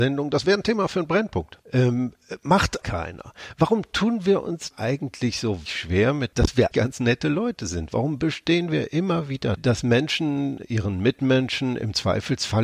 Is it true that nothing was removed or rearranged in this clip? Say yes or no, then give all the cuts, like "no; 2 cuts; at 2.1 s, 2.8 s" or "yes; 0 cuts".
no; 7 cuts; at 1.6 s, 2.8 s, 4.7 s, 5.7 s, 6.3 s, 6.7 s, 9.6 s